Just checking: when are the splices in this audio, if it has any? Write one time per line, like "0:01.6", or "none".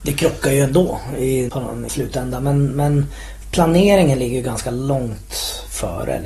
0:01.5
0:01.9